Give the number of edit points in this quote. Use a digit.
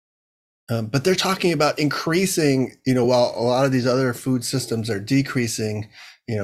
0